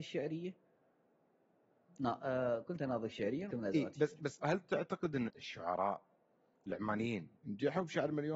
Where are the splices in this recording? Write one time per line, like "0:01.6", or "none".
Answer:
0:03.5
0:04.4
0:05.3
0:07.4